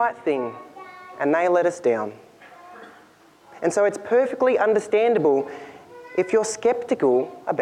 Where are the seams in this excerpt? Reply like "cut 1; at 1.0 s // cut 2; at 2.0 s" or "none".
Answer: none